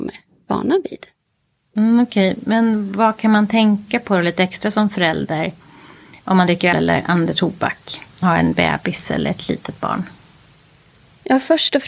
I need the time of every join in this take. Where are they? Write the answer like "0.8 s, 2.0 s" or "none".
6.7 s, 8.2 s